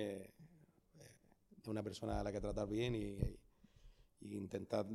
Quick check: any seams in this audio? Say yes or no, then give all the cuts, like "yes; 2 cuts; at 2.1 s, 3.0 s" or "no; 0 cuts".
no; 0 cuts